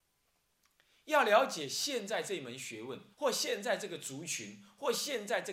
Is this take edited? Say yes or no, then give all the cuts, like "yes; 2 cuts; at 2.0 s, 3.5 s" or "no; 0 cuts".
yes; 1 cut; at 3.1 s